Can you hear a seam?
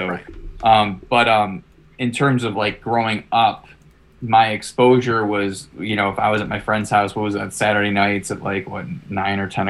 no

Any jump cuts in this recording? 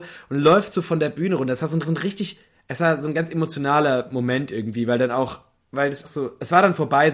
yes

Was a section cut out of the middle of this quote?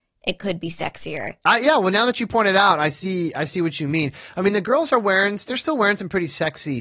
no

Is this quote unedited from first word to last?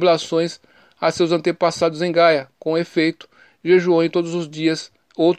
yes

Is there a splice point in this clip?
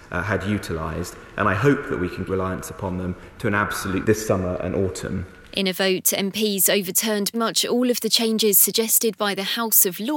yes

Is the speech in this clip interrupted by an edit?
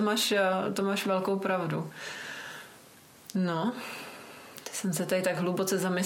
no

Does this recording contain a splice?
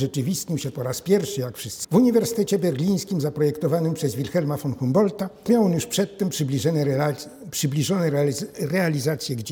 yes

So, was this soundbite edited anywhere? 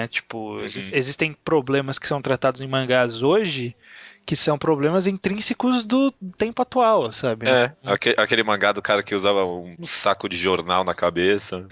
no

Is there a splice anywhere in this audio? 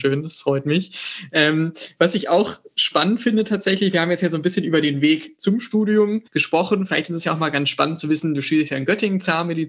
yes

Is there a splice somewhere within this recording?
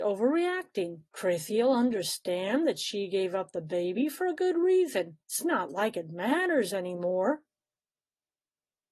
yes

